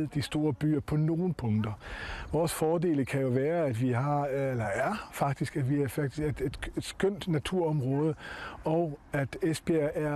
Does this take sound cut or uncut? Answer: uncut